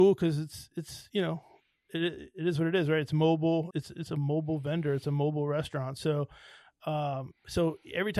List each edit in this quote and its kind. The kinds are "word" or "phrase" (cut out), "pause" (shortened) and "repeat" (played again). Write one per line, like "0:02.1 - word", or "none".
0:03.7 - word